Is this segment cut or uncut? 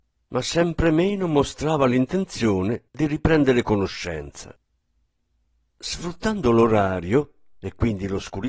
cut